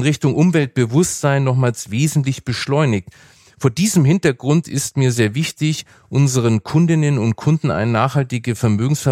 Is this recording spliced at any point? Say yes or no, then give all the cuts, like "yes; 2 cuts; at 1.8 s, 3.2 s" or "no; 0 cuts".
no; 0 cuts